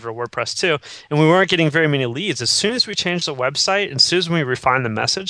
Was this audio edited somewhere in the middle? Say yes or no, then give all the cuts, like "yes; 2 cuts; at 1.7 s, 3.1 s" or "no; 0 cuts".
no; 0 cuts